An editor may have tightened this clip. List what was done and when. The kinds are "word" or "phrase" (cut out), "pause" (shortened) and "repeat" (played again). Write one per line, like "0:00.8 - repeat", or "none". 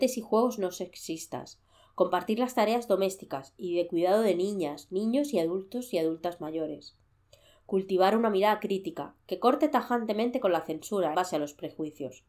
0:11.1 - word